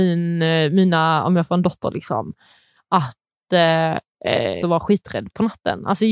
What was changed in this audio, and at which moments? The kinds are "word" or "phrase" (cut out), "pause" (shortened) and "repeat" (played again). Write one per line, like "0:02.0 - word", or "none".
0:04.6 - phrase